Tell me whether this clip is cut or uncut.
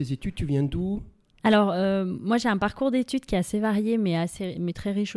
uncut